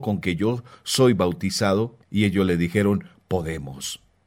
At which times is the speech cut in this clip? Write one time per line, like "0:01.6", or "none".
0:02.0